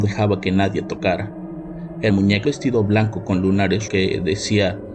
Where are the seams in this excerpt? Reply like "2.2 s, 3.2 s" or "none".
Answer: 2.1 s, 2.4 s, 3.9 s